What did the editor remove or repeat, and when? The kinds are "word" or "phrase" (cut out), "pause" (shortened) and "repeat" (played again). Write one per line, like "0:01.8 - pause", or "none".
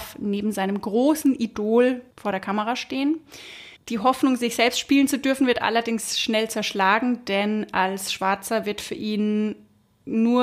0:02.1 - pause
0:03.8 - pause